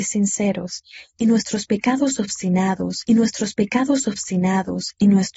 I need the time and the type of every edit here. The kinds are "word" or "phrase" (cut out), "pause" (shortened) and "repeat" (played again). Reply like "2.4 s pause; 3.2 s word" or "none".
3.1 s repeat